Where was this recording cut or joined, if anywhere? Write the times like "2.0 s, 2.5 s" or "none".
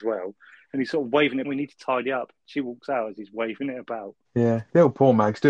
1.4 s, 4.2 s